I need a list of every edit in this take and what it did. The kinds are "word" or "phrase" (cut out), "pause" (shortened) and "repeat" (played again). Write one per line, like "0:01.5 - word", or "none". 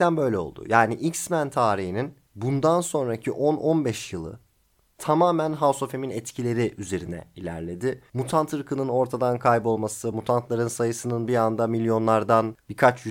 none